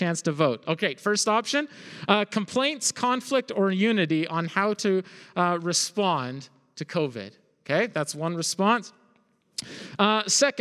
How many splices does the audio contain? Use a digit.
0